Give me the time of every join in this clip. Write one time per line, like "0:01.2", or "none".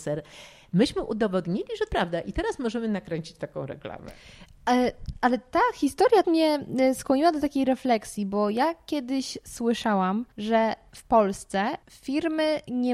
0:01.9
0:06.2
0:10.3
0:11.8

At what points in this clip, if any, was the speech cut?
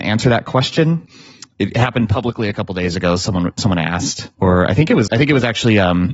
0:04.3
0:05.1

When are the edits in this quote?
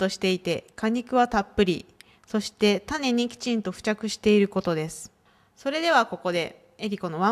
0:05.3

